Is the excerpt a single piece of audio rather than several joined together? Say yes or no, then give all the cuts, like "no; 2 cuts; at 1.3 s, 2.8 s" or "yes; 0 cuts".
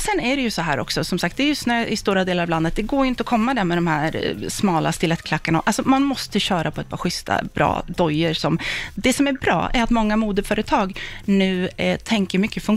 yes; 0 cuts